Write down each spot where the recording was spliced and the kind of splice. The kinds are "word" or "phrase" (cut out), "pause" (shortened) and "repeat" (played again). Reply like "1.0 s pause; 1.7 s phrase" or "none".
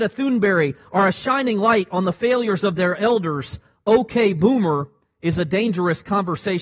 none

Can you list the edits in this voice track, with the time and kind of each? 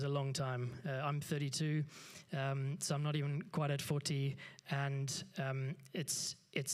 none

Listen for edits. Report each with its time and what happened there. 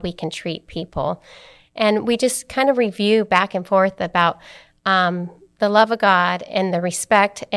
none

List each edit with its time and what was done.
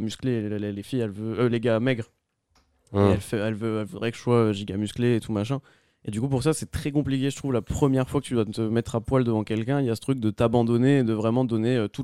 none

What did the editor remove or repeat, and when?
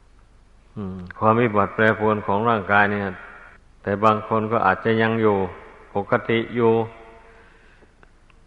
3.6 s pause

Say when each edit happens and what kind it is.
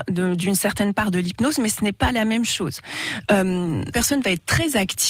3.9 s word

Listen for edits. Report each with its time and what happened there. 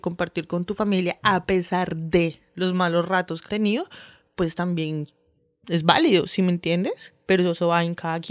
3.5 s word

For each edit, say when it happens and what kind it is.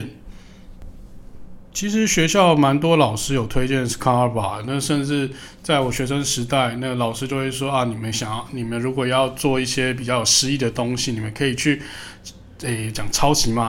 1.7 s pause

